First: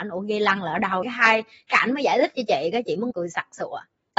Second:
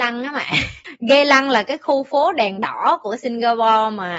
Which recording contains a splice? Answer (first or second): first